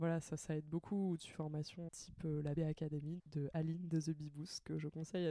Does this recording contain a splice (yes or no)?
yes